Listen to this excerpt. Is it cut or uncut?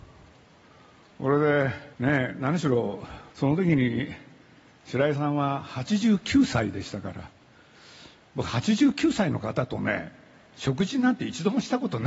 cut